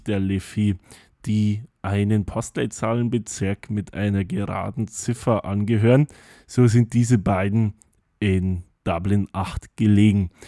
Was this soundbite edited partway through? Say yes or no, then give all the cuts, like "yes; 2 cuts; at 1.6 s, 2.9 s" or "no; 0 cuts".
no; 0 cuts